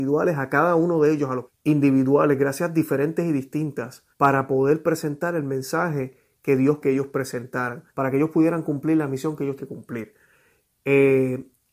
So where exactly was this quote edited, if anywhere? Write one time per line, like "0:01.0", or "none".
0:01.5
0:04.1
0:06.8
0:07.9
0:09.6